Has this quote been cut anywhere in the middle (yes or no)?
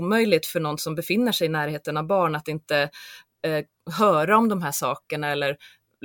no